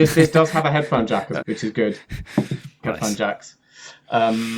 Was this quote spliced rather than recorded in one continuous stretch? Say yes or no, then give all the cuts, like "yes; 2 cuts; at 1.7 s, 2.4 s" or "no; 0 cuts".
yes; 2 cuts; at 1.4 s, 2.8 s